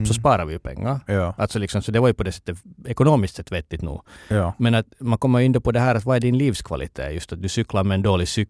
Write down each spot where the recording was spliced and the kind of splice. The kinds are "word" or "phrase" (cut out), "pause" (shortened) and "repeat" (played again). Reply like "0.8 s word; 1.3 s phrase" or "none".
none